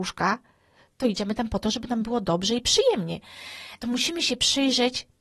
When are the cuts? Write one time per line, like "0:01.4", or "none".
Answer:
none